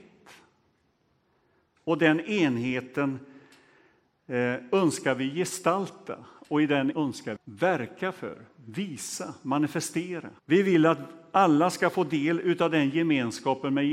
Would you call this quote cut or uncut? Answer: cut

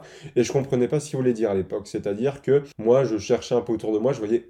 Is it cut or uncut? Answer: cut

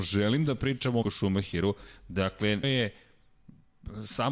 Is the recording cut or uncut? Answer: cut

